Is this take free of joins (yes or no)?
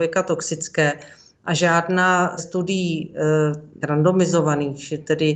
no